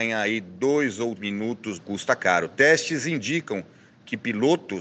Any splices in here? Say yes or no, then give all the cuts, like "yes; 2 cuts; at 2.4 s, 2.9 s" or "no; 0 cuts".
yes; 2 cuts; at 1.2 s, 1.8 s